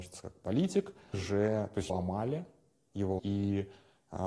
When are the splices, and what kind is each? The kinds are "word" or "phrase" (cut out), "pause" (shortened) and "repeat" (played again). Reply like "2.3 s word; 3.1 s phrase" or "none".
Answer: 1.1 s word; 1.9 s word; 3.2 s word